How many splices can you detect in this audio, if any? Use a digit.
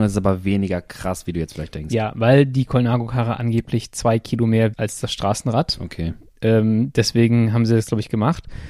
1